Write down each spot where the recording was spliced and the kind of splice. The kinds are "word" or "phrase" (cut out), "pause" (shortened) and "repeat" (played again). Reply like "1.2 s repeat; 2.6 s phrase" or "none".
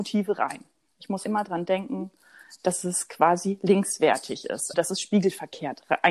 1.2 s word; 4.7 s word